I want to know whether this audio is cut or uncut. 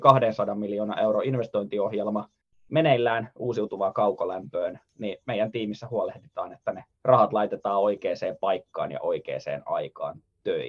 cut